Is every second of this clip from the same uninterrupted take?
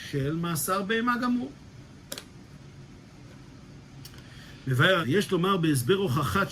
no; 1 cut; at 5.0 s

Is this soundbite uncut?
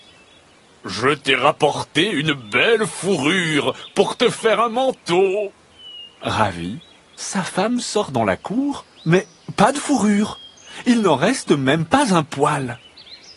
yes; 0 cuts

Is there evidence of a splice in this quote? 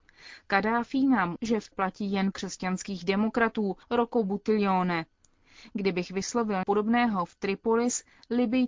yes; 5 cuts; at 1.4 s, 1.7 s, 2.3 s, 3.8 s, 6.6 s

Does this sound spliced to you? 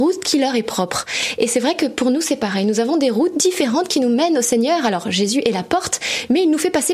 no; 0 cuts

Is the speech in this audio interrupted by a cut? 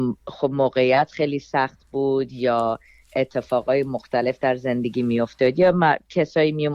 no; 0 cuts

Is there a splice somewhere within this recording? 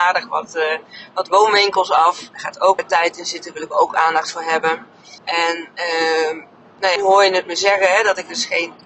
yes; 4 cuts; at 2.3 s, 2.8 s, 5.2 s, 7.0 s

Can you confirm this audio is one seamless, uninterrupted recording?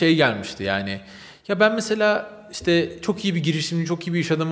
yes; 0 cuts

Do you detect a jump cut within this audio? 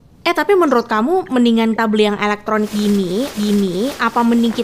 yes; 2 cuts; at 1.8 s, 3.3 s

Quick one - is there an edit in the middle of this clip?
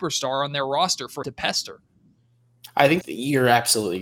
yes; 2 cuts; at 1.2 s, 3.0 s

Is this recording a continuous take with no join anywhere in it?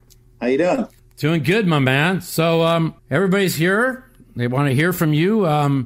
no; 2 cuts; at 1.0 s, 3.0 s

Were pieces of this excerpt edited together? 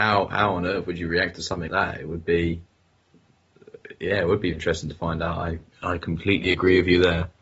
yes; 3 cuts; at 1.7 s, 4.5 s, 5.7 s

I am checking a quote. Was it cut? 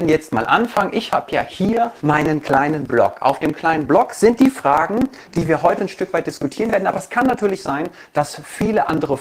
yes; 1 cut; at 2.0 s

